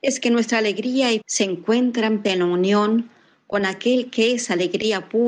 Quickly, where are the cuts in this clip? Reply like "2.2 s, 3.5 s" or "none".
1.2 s, 2.2 s

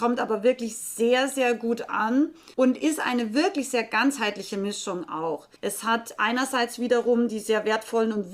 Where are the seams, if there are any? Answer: 2.5 s, 5.6 s

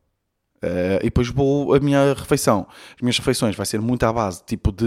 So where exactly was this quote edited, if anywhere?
none

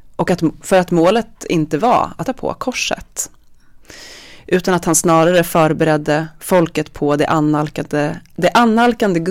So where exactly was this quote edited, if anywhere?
2.2 s

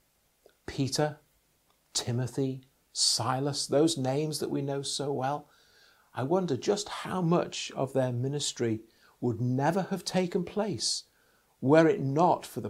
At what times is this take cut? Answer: none

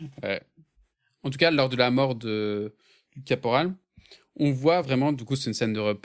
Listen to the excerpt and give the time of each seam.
none

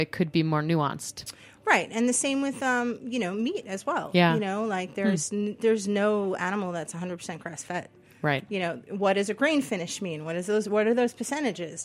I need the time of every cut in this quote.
none

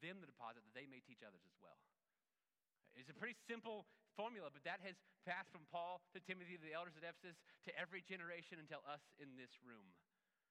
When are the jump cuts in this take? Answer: none

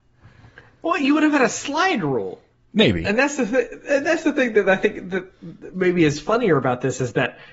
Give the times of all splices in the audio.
none

